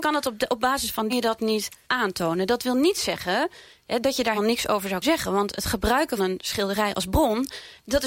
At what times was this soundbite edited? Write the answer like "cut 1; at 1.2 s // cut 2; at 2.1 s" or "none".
cut 1; at 1.1 s // cut 2; at 1.8 s // cut 3; at 4.4 s // cut 4; at 5.0 s // cut 5; at 6.2 s